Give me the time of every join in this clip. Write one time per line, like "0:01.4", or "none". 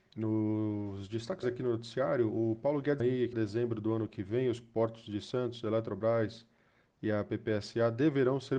0:01.4
0:03.0
0:03.3
0:04.6

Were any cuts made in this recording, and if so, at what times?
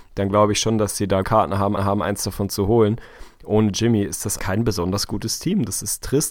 0:01.2
0:01.8
0:04.4

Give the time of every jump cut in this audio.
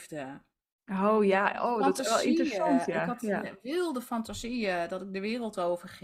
none

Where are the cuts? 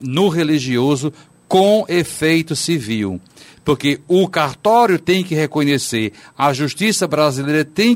none

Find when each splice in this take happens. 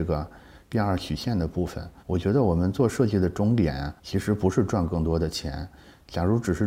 0:02.0
0:04.0

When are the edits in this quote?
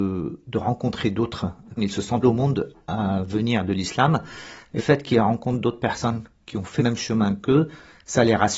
0:01.8
0:02.2
0:02.7
0:04.8
0:06.8

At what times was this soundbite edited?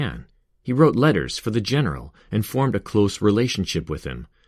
none

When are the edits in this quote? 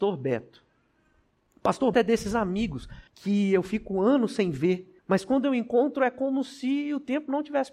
0:01.9
0:03.1
0:05.0

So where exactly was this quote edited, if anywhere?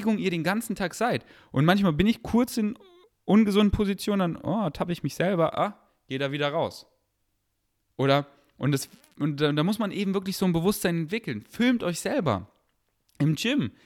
none

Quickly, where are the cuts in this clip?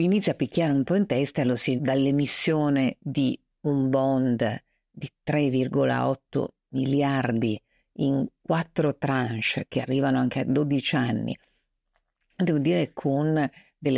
0:01.8

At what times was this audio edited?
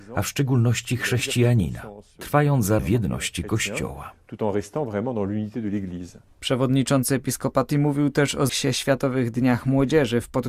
0:02.8
0:07.7
0:08.5

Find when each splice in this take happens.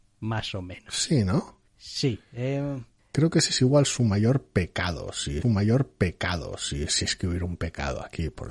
0:01.7
0:03.0
0:05.4

